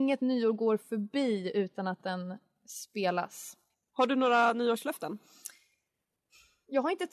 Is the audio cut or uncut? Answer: uncut